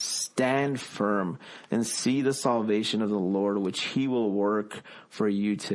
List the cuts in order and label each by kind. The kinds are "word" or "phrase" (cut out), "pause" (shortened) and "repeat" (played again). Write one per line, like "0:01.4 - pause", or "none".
none